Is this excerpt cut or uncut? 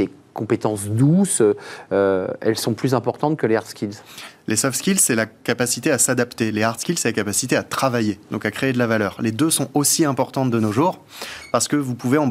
uncut